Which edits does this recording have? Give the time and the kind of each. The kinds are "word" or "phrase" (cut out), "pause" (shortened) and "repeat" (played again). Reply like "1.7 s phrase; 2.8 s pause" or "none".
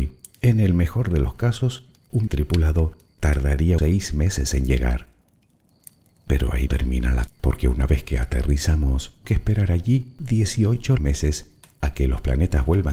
2.3 s word; 3.8 s word; 6.7 s word; 7.3 s word; 9.2 s word; 11.0 s word

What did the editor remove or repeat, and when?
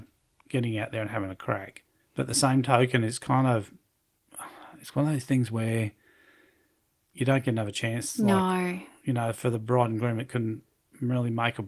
2.0 s pause

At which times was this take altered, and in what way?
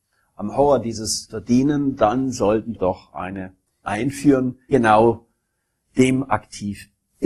1.3 s word; 2.7 s word; 3.8 s word; 4.7 s word

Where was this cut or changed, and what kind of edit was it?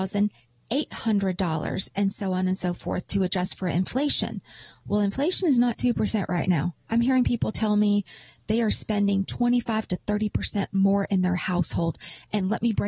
none

